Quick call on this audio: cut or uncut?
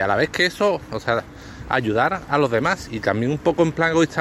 cut